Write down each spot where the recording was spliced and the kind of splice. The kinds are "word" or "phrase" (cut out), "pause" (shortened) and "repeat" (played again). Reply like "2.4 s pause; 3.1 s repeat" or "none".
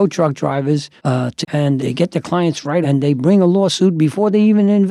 1.0 s pause; 1.4 s phrase; 1.8 s word; 2.8 s word